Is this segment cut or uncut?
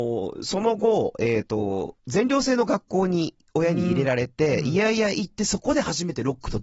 cut